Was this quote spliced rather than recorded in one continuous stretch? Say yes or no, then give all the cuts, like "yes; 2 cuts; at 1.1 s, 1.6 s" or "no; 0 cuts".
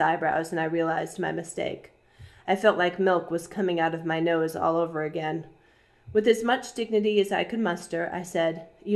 no; 0 cuts